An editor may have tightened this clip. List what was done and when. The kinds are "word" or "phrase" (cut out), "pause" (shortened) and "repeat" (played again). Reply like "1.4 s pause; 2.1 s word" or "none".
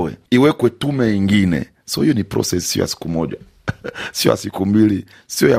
none